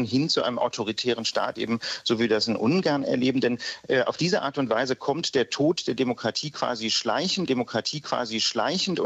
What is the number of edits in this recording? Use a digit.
1